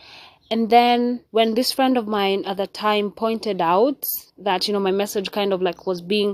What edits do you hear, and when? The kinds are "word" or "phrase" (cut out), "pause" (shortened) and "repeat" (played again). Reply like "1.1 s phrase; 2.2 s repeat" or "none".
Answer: 1.3 s pause; 4.3 s pause